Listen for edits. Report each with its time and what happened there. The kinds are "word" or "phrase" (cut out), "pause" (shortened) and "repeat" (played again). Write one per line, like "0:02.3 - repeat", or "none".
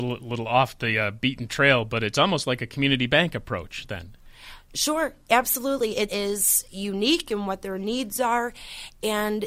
0:06.1 - phrase